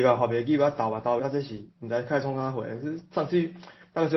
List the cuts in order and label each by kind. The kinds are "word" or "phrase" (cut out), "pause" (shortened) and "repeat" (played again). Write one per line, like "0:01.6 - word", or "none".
0:01.2 - phrase
0:01.7 - pause